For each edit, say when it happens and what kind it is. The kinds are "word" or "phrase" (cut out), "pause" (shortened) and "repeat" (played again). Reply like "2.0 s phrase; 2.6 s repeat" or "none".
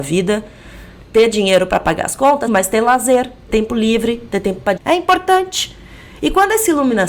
2.5 s word; 3.5 s word; 4.8 s word